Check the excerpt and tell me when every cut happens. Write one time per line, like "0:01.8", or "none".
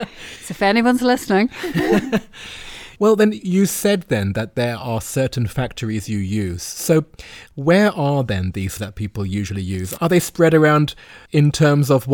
0:08.8
0:11.3